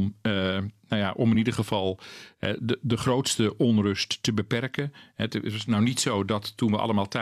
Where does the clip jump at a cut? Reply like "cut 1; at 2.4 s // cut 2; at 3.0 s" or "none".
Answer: none